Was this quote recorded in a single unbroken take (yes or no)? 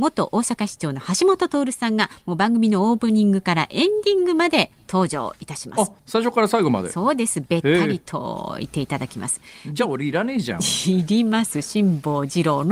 no